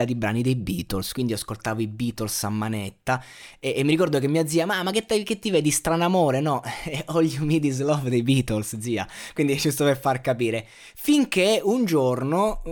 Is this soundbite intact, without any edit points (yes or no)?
yes